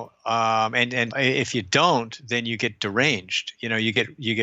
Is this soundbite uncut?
no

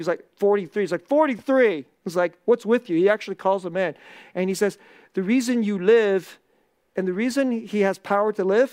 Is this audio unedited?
yes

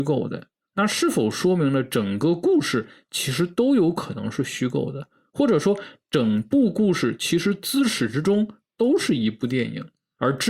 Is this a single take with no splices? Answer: yes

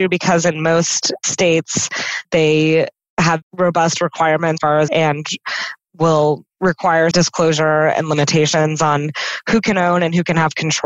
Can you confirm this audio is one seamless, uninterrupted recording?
no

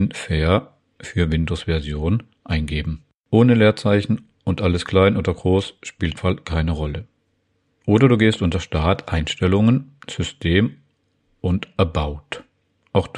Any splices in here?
yes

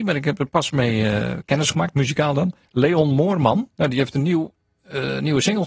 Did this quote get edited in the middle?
no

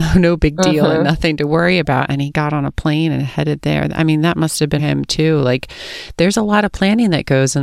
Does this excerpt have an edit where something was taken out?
yes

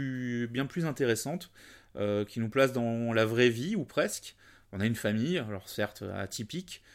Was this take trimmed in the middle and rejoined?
no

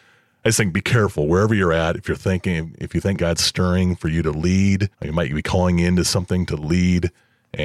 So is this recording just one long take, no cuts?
no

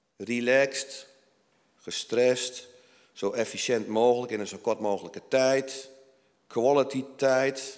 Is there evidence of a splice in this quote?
no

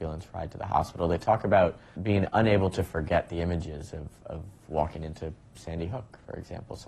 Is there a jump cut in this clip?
yes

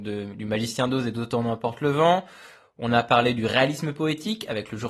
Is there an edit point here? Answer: no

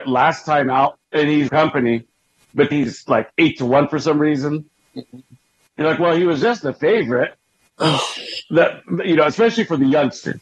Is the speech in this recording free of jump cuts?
no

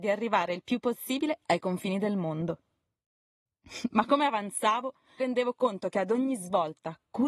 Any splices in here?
yes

